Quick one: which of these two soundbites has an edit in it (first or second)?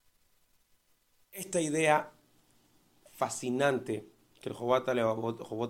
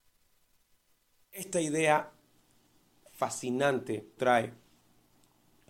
second